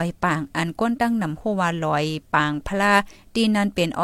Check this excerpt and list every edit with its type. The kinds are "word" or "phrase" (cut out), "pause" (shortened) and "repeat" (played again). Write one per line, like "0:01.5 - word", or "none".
none